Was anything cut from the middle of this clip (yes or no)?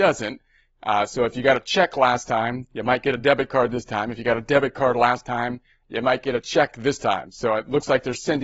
no